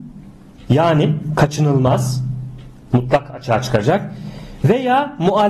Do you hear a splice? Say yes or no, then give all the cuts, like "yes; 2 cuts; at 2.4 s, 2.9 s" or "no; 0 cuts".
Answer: no; 0 cuts